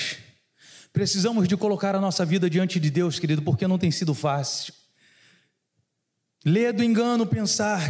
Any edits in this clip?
no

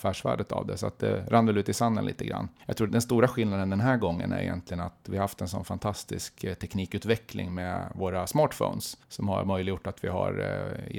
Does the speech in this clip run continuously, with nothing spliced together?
no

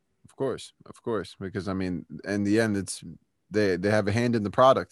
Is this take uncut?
yes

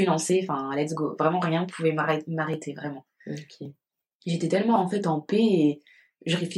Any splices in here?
no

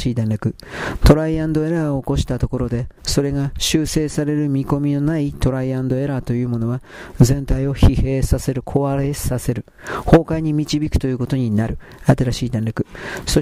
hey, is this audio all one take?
no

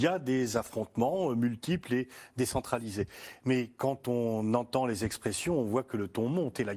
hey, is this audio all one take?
yes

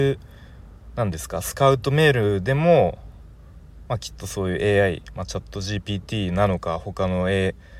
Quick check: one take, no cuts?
yes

